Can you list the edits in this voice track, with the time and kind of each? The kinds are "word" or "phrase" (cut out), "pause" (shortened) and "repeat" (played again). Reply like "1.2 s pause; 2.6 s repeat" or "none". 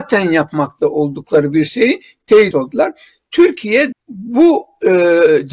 2.5 s word; 3.9 s word